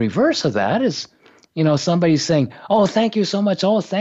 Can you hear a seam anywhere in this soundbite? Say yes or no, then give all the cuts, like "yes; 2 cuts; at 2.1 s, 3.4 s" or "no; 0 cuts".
no; 0 cuts